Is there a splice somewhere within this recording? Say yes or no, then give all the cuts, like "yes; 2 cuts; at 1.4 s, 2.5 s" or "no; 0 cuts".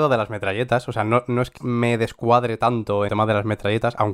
yes; 2 cuts; at 1.6 s, 3.1 s